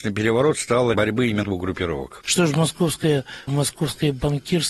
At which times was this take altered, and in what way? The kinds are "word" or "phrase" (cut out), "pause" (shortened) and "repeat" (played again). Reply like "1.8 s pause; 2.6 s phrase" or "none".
0.9 s word; 1.4 s word; 3.5 s word